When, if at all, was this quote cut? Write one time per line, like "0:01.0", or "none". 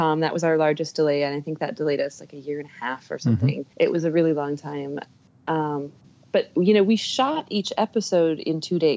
0:03.7
0:06.0